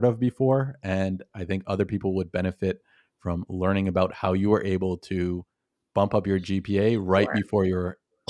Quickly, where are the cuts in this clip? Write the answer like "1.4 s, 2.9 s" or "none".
none